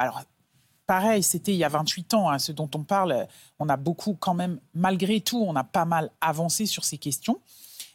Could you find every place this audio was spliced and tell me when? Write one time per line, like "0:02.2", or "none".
none